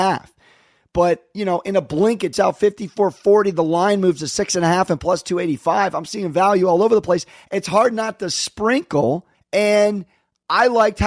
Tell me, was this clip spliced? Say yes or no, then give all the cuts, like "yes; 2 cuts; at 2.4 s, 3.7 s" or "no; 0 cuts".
yes; 2 cuts; at 2.3 s, 9.3 s